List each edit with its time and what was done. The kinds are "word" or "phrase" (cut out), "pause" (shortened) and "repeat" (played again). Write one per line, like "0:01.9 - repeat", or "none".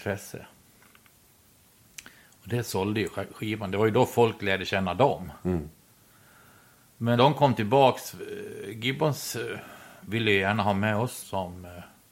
0:07.2 - word
0:11.2 - word